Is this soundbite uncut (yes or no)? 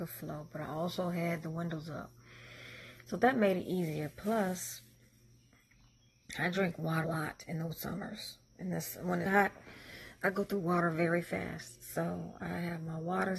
no